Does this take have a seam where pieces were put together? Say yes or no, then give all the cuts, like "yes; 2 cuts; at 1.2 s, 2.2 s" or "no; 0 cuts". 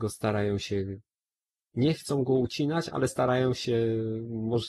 no; 0 cuts